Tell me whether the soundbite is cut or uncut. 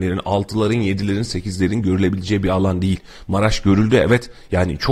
uncut